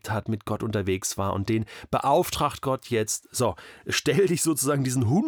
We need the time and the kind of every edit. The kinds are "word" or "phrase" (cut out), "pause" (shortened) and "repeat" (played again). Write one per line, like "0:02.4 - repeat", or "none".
none

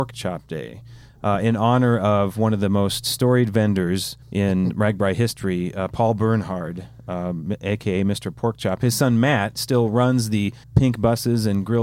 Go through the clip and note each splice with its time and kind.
0:04.2 - pause
0:10.6 - pause

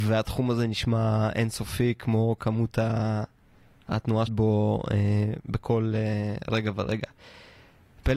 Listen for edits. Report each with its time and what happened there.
0:04.3 - word

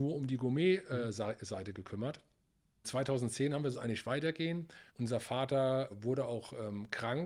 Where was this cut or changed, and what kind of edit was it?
0:02.8 - word
0:03.7 - phrase
0:04.9 - pause
0:05.9 - word

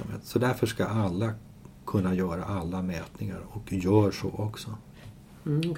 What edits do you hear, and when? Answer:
none

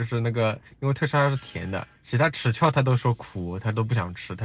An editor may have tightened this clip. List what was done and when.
0:02.0 - pause

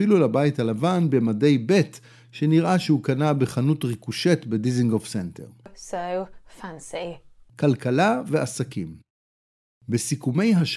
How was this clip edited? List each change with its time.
none

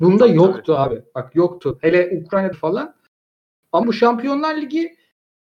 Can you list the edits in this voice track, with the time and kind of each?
0:02.5 - word
0:03.8 - word

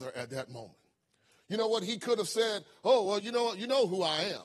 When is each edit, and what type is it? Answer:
none

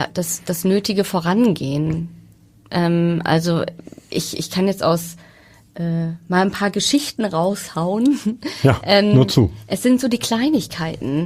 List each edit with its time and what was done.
none

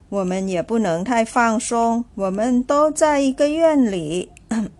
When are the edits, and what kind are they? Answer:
0:02.1 - pause

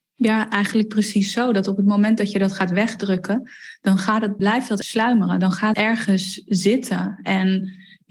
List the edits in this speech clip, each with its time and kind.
0:04.4 - word
0:04.8 - word
0:05.7 - word

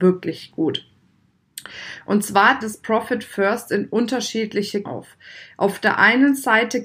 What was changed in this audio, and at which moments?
0:02.6 - word
0:04.9 - word

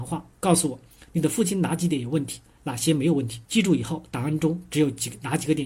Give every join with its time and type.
0:03.4 - pause

